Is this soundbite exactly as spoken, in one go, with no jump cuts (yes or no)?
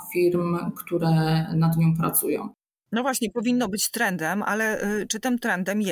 yes